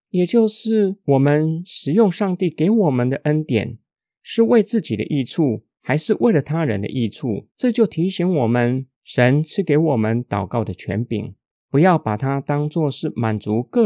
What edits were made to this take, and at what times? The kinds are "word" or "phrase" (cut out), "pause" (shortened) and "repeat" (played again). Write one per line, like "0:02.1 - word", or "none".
0:07.5 - pause